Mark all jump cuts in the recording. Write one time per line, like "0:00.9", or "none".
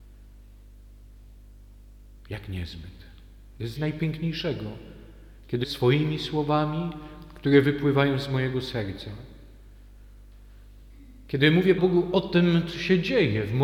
0:03.8
0:05.6
0:11.8

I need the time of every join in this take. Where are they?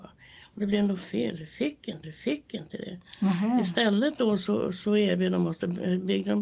0:02.0

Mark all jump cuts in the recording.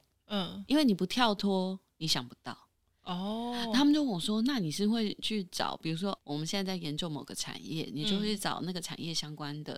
0:06.2

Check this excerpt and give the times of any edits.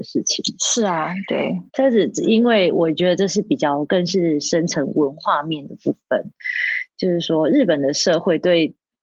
0:01.7

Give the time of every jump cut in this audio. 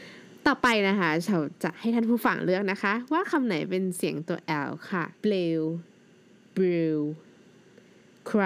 0:05.2

